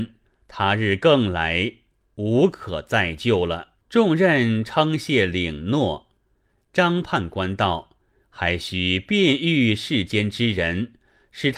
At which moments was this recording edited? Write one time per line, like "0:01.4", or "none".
0:03.8
0:08.0